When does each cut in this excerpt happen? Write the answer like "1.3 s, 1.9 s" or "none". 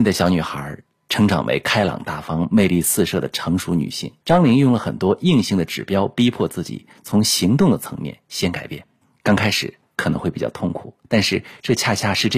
4.2 s, 9.0 s, 11.0 s